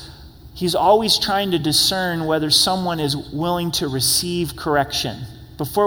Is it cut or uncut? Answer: uncut